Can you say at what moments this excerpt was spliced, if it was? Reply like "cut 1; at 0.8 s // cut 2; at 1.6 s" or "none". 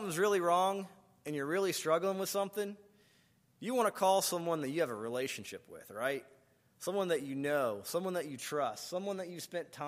none